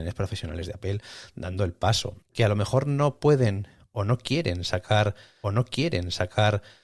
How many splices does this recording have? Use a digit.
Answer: 2